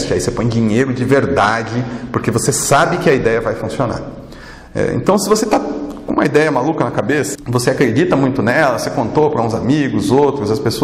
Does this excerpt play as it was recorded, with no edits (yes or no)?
no